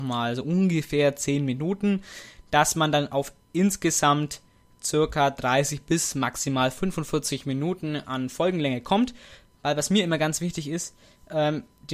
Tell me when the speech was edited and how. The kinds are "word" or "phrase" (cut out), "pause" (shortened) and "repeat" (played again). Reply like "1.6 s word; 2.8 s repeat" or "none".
none